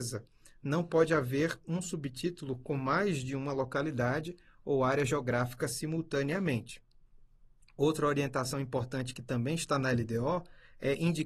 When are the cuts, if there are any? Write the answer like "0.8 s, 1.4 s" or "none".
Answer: none